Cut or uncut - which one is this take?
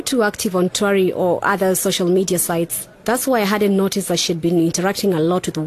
cut